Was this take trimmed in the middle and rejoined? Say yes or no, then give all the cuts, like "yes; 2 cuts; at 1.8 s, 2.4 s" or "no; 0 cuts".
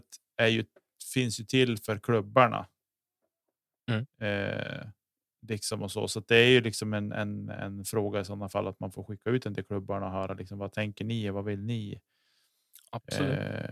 no; 0 cuts